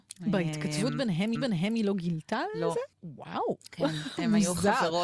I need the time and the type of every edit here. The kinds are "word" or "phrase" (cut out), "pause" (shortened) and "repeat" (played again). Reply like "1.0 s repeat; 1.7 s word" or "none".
1.4 s repeat; 2.9 s pause